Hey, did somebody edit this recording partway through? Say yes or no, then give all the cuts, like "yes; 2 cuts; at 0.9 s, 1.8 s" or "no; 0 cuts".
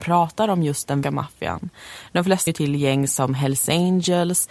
yes; 2 cuts; at 1.0 s, 2.5 s